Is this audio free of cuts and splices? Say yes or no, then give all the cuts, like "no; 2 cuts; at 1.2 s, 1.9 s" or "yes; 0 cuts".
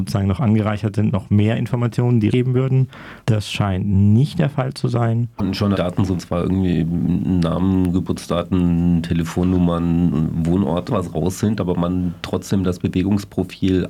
no; 6 cuts; at 1.1 s, 2.3 s, 3.2 s, 5.7 s, 6.2 s, 10.9 s